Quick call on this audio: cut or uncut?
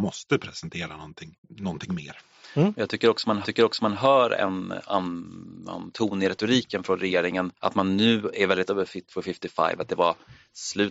cut